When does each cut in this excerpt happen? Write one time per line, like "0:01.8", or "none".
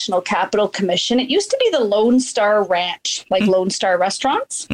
none